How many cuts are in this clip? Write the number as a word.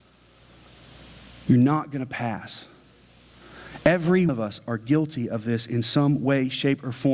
one